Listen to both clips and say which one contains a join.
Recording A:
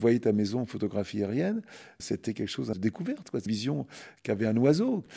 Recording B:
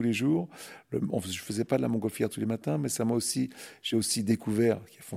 A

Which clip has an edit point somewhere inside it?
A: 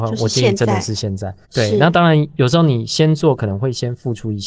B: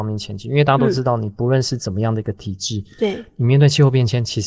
A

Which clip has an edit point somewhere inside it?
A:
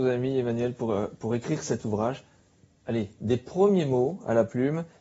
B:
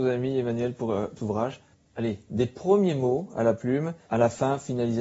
B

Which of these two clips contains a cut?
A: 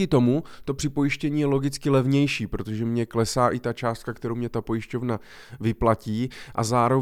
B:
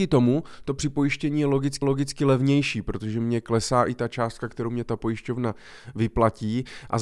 B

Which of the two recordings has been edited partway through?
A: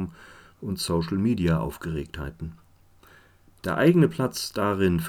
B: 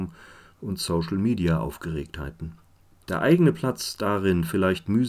B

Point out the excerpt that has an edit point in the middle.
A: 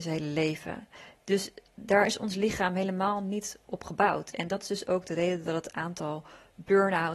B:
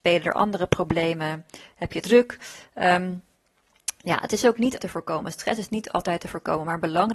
B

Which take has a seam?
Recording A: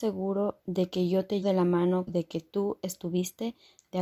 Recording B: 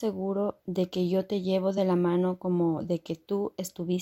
A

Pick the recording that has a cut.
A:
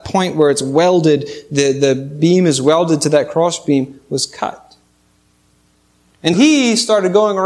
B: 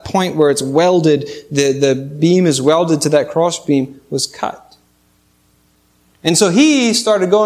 A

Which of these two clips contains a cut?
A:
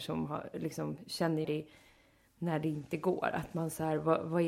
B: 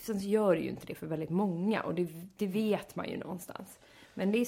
A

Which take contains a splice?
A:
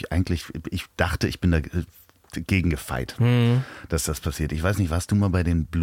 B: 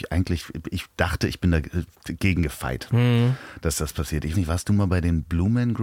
B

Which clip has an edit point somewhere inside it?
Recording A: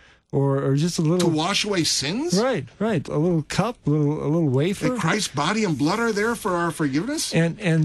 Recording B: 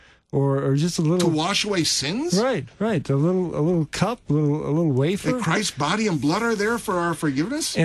A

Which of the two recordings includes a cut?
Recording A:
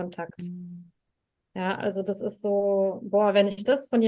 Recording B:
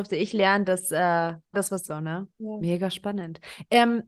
B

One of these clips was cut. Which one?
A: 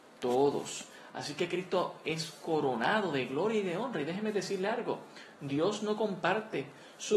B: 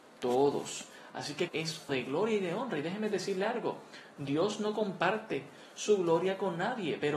B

